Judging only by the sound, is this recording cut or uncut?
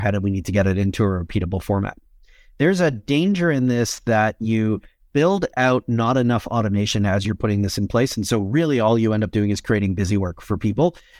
uncut